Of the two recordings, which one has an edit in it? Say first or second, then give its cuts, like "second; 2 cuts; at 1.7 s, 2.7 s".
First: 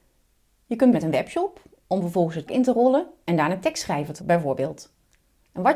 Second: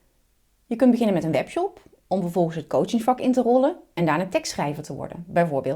first; 3 cuts; at 0.9 s, 2.5 s, 4.2 s